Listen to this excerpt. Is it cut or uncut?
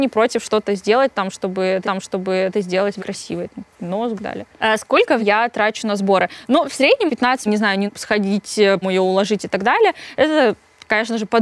cut